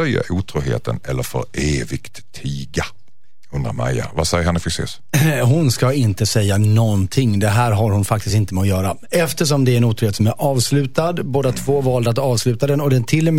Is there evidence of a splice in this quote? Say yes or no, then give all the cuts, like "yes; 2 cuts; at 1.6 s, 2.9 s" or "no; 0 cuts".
no; 0 cuts